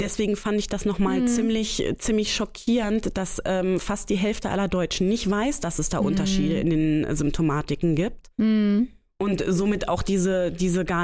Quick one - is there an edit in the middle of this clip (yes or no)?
no